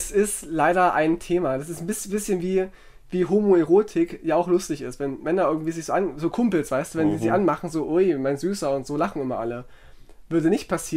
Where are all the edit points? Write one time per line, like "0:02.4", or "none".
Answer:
none